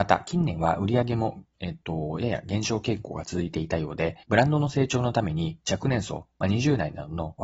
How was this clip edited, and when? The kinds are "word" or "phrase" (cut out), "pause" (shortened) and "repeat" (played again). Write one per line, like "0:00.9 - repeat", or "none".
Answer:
0:01.5 - pause
0:04.2 - pause